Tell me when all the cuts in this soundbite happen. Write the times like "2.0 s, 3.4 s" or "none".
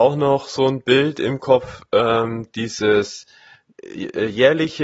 none